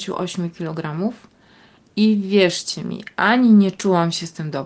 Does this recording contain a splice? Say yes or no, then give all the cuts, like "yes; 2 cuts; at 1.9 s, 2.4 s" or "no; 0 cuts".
no; 0 cuts